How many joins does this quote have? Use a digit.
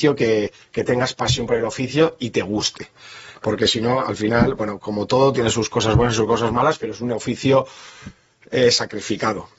0